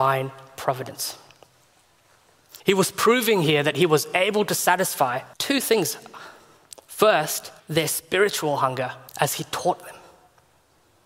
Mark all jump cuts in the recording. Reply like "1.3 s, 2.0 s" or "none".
2.6 s, 5.3 s, 7.6 s, 9.1 s